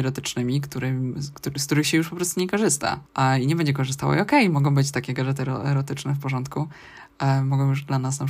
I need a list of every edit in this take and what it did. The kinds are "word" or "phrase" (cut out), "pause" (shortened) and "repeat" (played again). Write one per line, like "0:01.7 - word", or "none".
0:03.1 - pause